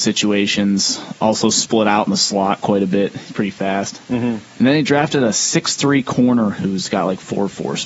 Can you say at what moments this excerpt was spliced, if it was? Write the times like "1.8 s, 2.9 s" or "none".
none